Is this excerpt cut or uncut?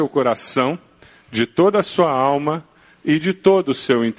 uncut